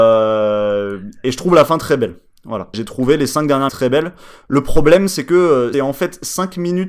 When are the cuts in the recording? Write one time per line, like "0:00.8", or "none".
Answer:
0:02.7
0:03.7
0:05.7